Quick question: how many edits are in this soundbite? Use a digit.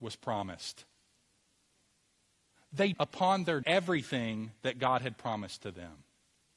2